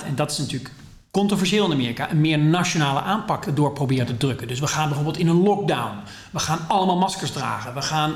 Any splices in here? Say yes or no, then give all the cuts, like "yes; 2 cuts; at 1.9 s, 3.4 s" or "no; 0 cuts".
no; 0 cuts